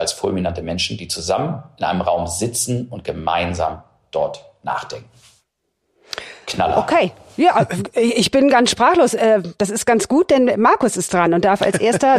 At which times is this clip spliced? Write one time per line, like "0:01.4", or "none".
none

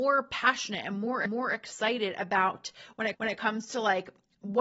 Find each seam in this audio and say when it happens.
0:01.3
0:03.1

